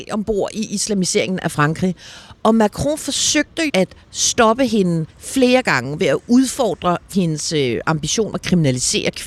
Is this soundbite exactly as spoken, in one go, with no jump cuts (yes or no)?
no